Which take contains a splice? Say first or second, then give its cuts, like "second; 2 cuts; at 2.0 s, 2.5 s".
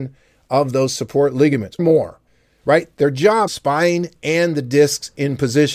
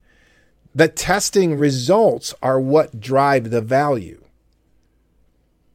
first; 3 cuts; at 1.8 s, 2.3 s, 3.5 s